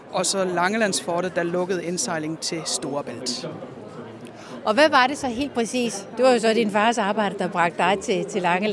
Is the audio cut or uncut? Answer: uncut